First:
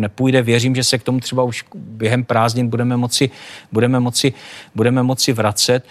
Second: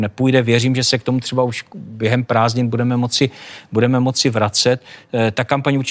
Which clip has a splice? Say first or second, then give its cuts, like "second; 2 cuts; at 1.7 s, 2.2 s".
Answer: first; 1 cut; at 4.0 s